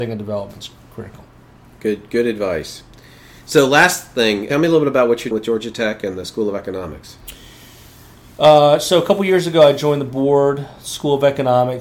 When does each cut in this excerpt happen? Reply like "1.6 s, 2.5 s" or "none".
4.5 s, 5.3 s